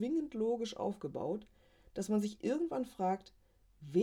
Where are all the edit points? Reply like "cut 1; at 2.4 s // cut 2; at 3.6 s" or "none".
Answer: none